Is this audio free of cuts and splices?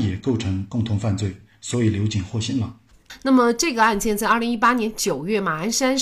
yes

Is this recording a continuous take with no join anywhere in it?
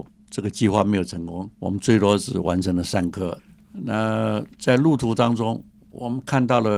no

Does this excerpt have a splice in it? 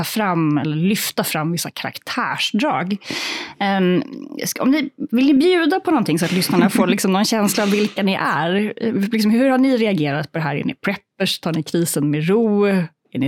no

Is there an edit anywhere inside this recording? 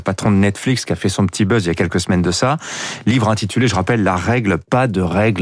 no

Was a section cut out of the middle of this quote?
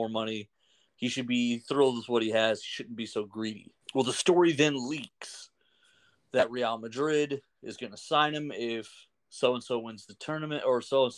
yes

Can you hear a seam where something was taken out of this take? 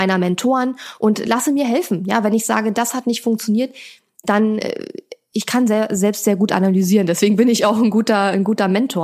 no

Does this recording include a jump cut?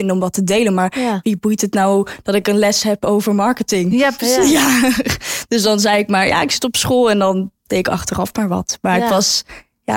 no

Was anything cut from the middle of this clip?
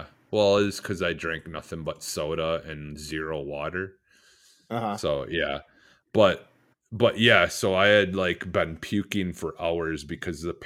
no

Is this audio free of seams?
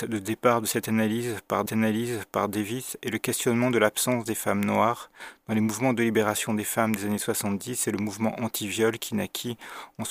no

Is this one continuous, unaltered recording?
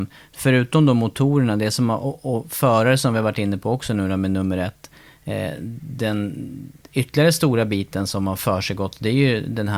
yes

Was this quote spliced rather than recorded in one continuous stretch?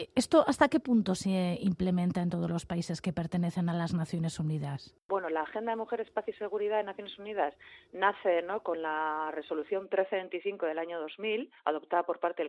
yes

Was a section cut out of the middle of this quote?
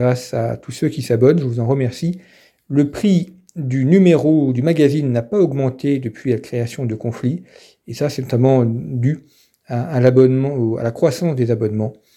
no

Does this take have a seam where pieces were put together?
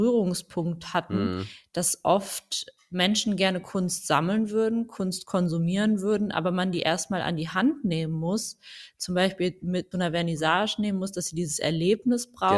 yes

